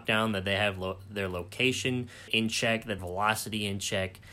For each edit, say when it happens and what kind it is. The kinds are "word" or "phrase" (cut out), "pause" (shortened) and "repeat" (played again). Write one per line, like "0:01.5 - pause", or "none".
0:02.3 - word
0:03.0 - phrase